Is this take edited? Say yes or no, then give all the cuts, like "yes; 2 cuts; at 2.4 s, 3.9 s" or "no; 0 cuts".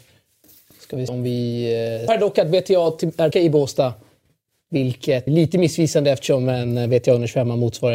yes; 4 cuts; at 1.1 s, 2.1 s, 3.3 s, 5.3 s